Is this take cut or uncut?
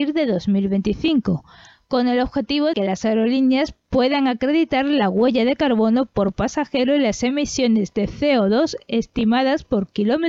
cut